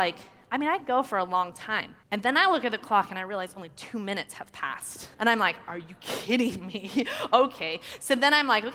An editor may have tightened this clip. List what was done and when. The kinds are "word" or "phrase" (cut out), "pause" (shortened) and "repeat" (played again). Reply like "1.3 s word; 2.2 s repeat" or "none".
2.0 s pause; 5.1 s pause